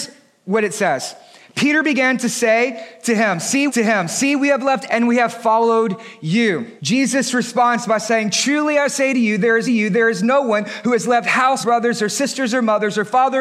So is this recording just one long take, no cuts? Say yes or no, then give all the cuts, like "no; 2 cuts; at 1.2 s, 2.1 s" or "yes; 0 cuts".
no; 5 cuts; at 3.7 s, 4.9 s, 6.8 s, 9.7 s, 11.6 s